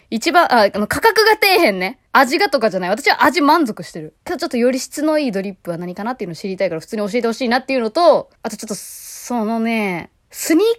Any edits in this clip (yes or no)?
yes